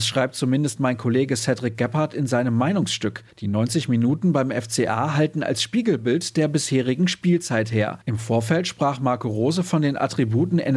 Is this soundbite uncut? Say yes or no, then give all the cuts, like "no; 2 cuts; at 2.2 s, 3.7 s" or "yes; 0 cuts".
no; 2 cuts; at 3.3 s, 8.0 s